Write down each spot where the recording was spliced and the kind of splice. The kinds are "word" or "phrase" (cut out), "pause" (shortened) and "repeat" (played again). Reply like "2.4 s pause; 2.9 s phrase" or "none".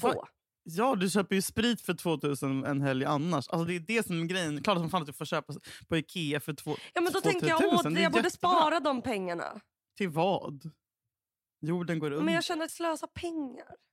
12.7 s word